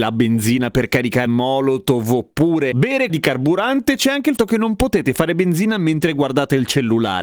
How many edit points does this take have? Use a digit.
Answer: 3